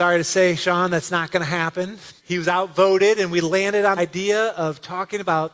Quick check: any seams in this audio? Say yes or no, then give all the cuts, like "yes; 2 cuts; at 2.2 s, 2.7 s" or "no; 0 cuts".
yes; 2 cuts; at 2.2 s, 4.0 s